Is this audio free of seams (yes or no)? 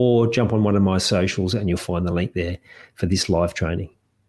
yes